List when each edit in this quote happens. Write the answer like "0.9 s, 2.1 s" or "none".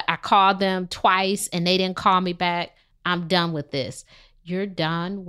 none